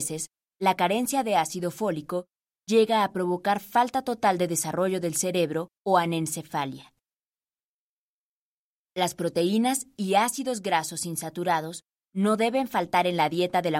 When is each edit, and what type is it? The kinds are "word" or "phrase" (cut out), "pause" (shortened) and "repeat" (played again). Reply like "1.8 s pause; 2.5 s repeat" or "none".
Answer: 5.8 s pause